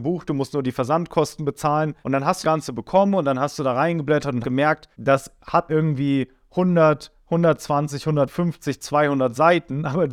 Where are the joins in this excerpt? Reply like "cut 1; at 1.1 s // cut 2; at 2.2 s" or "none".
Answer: cut 1; at 2.0 s // cut 2; at 2.4 s // cut 3; at 4.4 s // cut 4; at 4.9 s // cut 5; at 5.7 s